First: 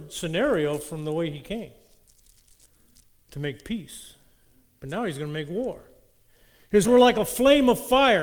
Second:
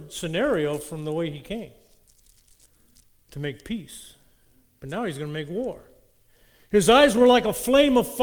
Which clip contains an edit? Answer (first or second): first